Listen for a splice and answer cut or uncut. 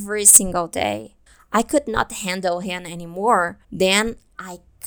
cut